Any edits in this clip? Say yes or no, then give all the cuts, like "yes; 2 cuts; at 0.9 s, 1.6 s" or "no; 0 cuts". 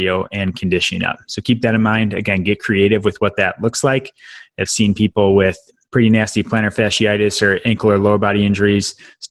no; 0 cuts